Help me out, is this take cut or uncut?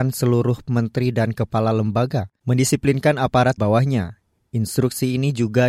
cut